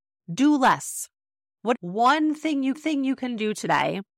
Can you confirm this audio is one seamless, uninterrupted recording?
no; 2 cuts; at 1.7 s, 2.7 s

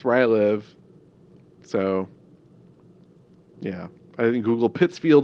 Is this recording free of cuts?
yes; 0 cuts

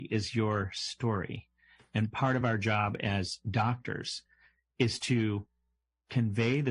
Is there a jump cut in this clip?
no; 0 cuts

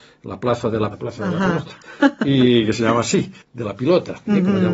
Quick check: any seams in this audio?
yes; 2 cuts; at 0.9 s, 3.4 s

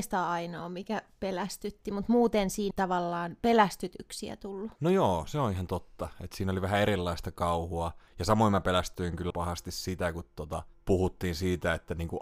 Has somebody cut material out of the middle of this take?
yes; 3 cuts; at 2.7 s, 4.8 s, 9.3 s

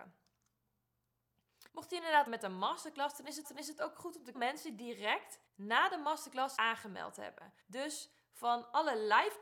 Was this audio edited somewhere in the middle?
yes; 7 cuts; at 1.7 s, 2.3 s, 3.4 s, 4.3 s, 5.5 s, 6.6 s, 7.6 s

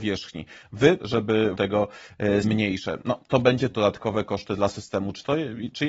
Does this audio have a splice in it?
yes; 4 cuts; at 1.0 s, 1.5 s, 2.4 s, 3.7 s

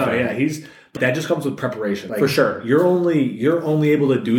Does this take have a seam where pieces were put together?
yes; 2 cuts; at 1.0 s, 2.1 s

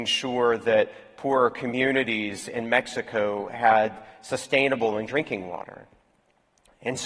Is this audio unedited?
no; 1 cut; at 5.1 s

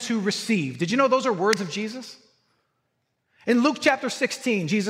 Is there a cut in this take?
no; 0 cuts

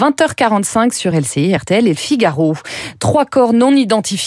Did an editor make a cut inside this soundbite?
no; 0 cuts

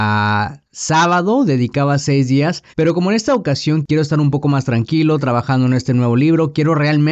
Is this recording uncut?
no; 1 cut; at 2.7 s

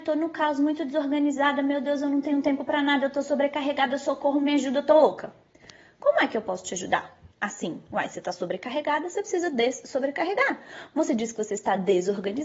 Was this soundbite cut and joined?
yes; 1 cut; at 7.3 s

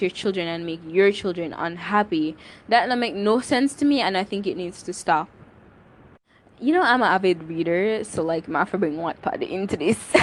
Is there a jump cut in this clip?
no; 0 cuts

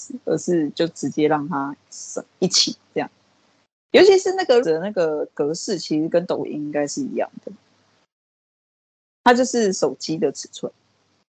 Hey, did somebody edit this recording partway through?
yes; 1 cut; at 4.6 s

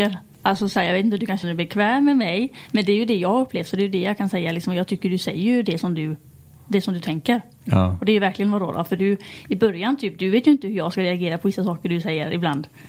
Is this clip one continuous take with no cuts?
no; 1 cut; at 1.4 s

